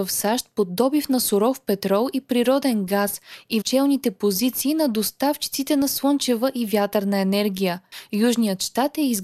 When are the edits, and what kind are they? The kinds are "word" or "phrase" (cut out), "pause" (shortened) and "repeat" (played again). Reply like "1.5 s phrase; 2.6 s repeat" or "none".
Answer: 3.6 s word